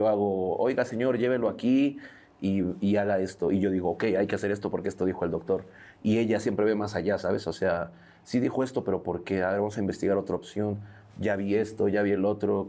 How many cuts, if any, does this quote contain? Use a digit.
0